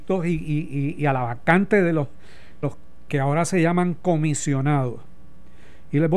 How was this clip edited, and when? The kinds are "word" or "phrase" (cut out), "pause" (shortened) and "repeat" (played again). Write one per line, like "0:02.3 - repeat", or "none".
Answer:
0:02.6 - word